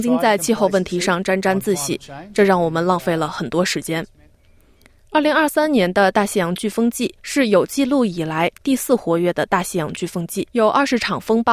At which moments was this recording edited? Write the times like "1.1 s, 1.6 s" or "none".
7.2 s, 10.5 s